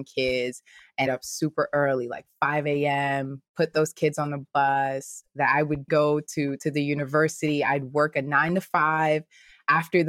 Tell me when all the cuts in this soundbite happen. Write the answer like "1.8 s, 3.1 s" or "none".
1.1 s, 5.9 s